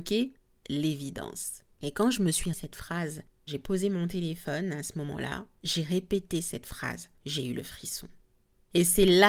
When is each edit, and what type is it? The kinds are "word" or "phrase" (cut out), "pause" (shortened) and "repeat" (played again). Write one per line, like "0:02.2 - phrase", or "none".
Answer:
0:02.5 - word
0:07.2 - pause